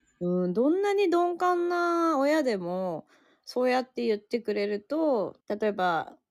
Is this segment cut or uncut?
cut